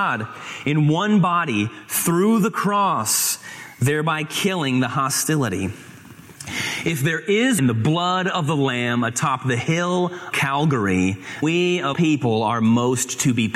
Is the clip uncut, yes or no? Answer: no